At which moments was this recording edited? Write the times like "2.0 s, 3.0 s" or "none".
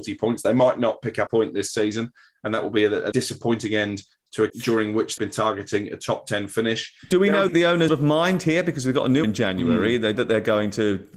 1.3 s, 3.1 s, 4.5 s, 5.2 s, 7.5 s, 7.9 s, 9.2 s, 10.2 s